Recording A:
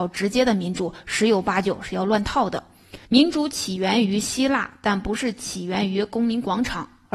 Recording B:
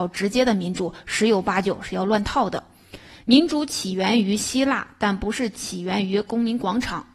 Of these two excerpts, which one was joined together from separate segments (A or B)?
A